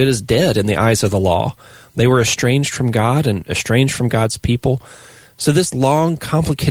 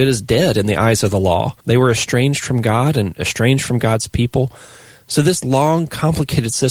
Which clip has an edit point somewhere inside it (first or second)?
second